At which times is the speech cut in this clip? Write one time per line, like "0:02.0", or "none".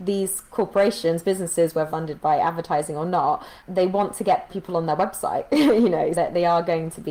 0:01.9
0:04.5
0:06.1